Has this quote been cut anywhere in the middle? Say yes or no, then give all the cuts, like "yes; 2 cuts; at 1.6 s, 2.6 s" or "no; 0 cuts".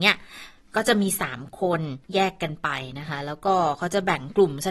yes; 1 cut; at 2.0 s